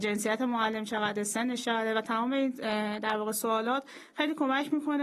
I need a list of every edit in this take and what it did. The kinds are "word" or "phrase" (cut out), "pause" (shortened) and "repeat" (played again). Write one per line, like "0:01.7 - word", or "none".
none